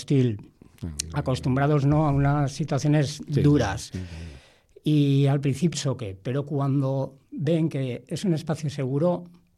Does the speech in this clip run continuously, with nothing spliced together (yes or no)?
no